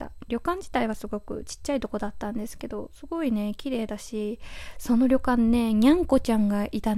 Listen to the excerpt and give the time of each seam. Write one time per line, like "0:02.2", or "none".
none